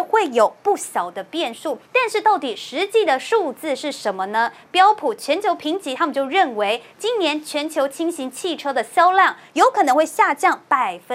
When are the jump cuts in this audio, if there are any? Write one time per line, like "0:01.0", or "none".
0:01.8